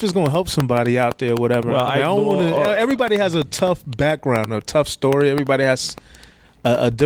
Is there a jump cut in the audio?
no; 0 cuts

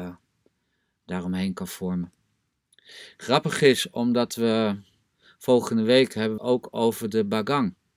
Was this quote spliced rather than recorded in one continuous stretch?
yes; 1 cut; at 6.4 s

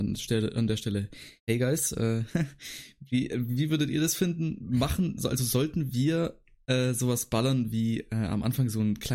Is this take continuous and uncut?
no; 1 cut; at 1.4 s

